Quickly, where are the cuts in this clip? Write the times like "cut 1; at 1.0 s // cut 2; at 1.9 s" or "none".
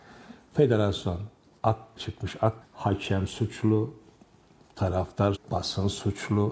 cut 1; at 2.0 s // cut 2; at 2.6 s // cut 3; at 5.3 s